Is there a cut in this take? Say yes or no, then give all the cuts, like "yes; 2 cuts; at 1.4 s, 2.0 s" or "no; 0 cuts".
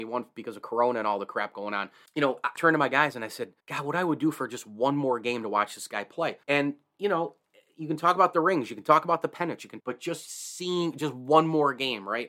yes; 5 cuts; at 2.1 s, 2.6 s, 3.6 s, 6.4 s, 9.8 s